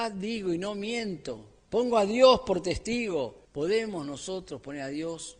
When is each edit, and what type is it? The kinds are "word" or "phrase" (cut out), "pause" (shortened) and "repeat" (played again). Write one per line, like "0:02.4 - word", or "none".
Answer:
none